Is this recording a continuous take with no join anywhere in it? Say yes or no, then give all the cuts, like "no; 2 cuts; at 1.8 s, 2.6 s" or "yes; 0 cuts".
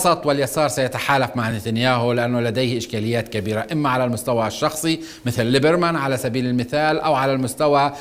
yes; 0 cuts